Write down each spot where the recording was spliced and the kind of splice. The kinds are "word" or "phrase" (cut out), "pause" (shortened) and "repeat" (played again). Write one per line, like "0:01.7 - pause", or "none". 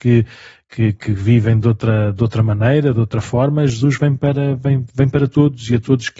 none